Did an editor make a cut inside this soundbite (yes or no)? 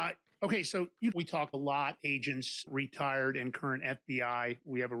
yes